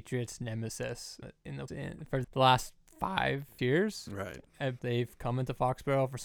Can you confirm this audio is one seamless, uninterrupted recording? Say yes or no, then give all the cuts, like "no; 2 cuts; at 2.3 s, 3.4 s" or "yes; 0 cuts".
no; 5 cuts; at 1.2 s, 1.7 s, 2.2 s, 3.6 s, 4.8 s